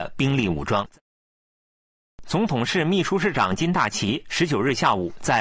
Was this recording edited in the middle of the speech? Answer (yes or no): no